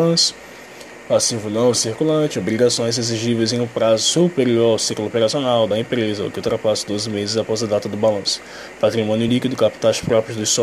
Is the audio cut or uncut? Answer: uncut